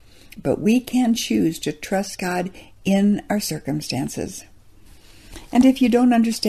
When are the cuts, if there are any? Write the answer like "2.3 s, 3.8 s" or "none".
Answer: none